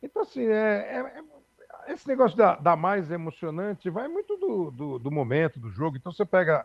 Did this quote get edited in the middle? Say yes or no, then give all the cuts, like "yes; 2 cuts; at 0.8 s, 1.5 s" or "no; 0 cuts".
no; 0 cuts